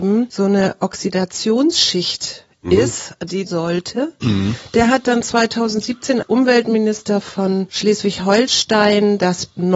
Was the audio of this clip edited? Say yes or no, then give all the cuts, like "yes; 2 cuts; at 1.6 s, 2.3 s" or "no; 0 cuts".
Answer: yes; 2 cuts; at 3.5 s, 6.2 s